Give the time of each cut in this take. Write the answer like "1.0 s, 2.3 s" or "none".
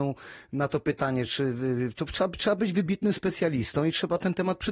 none